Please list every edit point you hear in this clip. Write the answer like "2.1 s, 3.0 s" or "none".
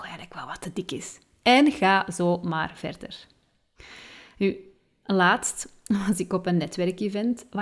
none